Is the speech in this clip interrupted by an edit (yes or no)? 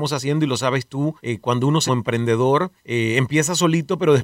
yes